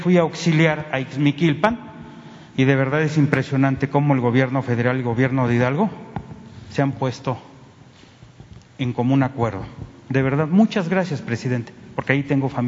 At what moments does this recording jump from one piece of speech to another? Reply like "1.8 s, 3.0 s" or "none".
none